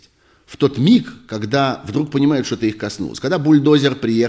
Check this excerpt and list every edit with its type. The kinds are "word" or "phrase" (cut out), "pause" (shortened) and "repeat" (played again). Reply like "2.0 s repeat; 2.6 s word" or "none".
none